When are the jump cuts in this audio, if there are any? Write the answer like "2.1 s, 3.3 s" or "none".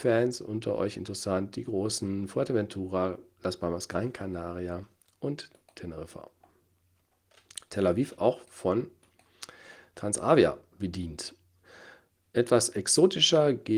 none